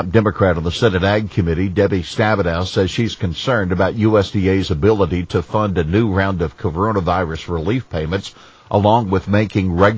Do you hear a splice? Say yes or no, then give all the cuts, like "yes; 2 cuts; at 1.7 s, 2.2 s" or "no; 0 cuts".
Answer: no; 0 cuts